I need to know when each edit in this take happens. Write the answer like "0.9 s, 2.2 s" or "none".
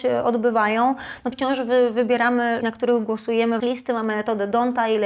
1.3 s, 2.6 s, 3.6 s